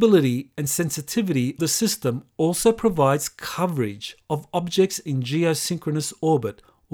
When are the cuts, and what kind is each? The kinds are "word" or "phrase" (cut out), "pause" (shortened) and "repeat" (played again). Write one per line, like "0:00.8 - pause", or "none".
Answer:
0:01.6 - word